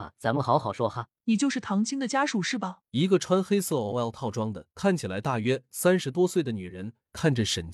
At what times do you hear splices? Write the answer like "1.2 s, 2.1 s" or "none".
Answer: 1.2 s, 2.8 s, 4.7 s